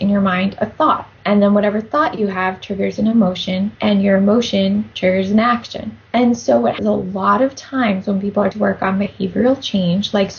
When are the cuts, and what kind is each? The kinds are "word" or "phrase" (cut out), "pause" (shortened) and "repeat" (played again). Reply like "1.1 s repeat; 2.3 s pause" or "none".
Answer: 1.1 s pause; 3.8 s pause; 4.9 s pause; 6.1 s pause; 6.8 s phrase; 8.5 s word

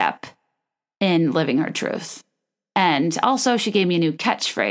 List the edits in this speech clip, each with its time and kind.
none

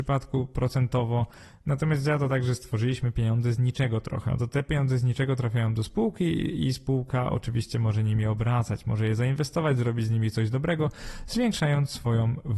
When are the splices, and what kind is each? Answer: none

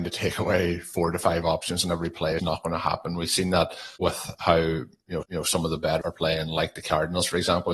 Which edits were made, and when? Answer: 2.4 s word; 4.0 s pause; 5.2 s repeat; 6.0 s word

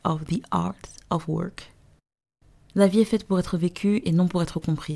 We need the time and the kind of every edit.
none

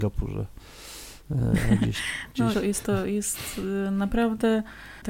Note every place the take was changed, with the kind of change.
1.2 s pause; 2.5 s word

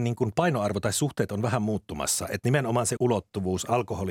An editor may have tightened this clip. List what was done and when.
3.0 s word

